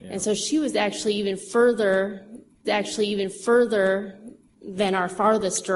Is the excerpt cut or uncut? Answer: cut